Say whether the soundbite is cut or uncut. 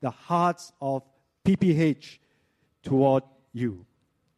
uncut